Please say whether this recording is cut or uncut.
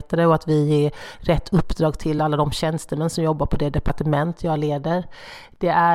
uncut